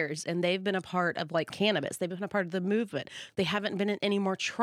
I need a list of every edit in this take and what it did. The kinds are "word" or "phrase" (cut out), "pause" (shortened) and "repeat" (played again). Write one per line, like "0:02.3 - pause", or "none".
0:01.5 - word

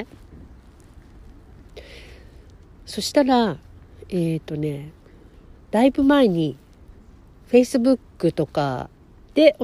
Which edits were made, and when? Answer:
none

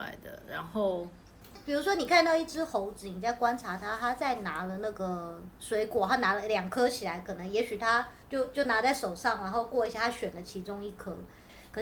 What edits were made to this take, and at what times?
0:08.2 - pause

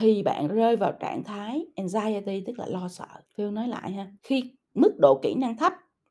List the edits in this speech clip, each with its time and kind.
0:03.3 - pause
0:04.2 - pause

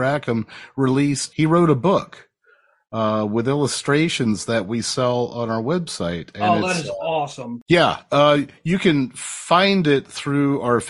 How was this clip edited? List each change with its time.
0:01.3 - word

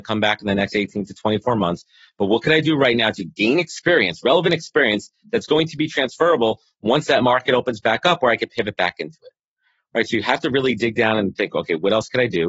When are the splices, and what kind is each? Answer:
none

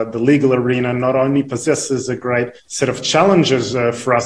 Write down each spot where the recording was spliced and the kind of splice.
0:02.6 - pause

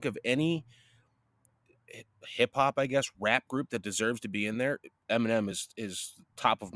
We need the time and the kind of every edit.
none

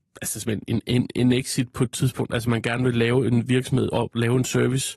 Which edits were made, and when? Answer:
none

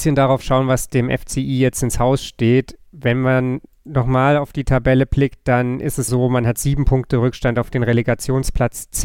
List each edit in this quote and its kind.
0:06.1 - word

